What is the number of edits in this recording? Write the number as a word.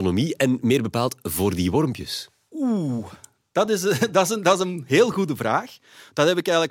zero